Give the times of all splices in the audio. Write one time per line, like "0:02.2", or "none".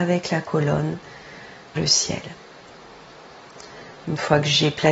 0:01.8